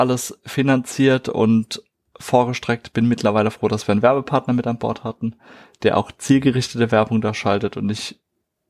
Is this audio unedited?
yes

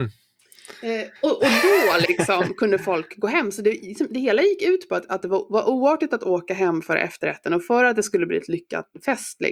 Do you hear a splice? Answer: yes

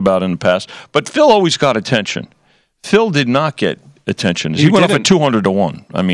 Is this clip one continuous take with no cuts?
yes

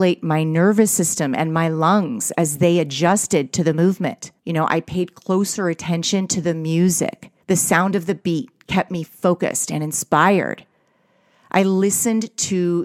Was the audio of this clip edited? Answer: yes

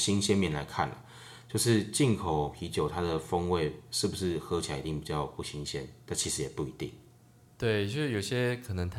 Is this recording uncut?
yes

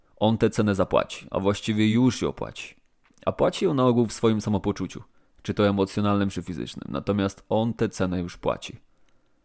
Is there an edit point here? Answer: no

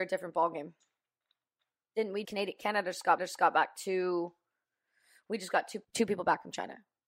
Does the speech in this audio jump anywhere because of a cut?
yes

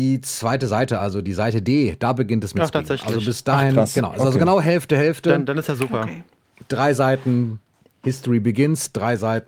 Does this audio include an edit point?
no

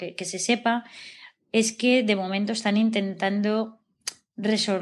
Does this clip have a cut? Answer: no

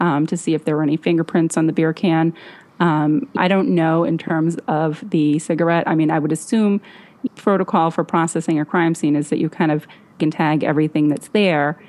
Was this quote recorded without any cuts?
no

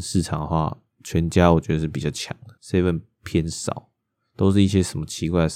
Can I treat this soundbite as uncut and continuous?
no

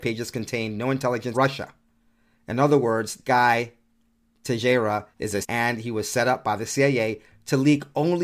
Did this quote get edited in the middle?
yes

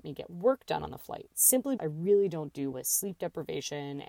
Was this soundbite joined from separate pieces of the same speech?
yes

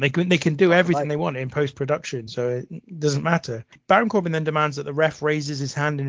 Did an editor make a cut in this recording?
no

